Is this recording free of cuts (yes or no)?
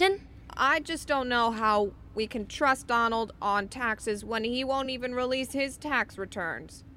yes